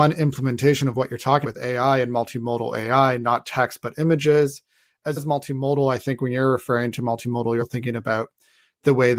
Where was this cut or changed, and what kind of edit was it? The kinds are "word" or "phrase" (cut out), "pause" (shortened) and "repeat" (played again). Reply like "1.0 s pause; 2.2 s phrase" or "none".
1.4 s word; 3.4 s word; 5.2 s word; 7.6 s word